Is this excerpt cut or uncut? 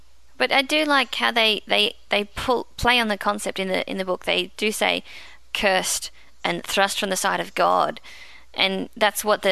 uncut